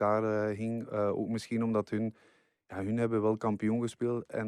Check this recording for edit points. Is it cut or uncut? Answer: uncut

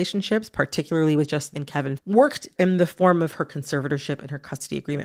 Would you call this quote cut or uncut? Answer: cut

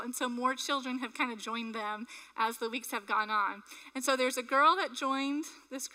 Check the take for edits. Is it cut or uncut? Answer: uncut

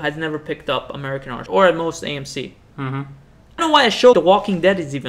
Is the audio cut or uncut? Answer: cut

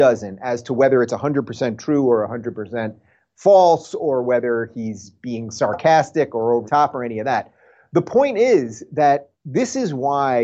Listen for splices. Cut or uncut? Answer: cut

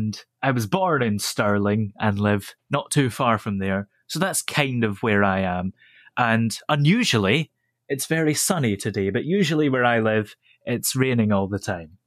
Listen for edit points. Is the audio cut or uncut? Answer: uncut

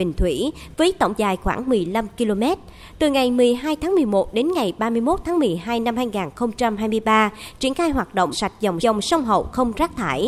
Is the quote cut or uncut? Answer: cut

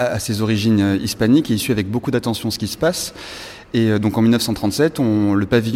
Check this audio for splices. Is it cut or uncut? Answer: uncut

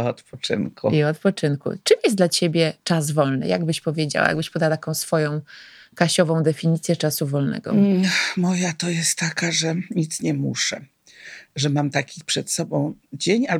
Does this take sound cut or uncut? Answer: uncut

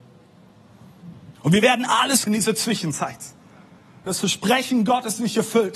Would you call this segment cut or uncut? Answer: cut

